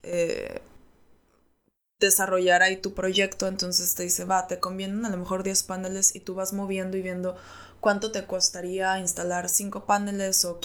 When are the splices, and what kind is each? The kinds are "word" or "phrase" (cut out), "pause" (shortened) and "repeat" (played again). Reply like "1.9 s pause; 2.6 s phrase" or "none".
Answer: none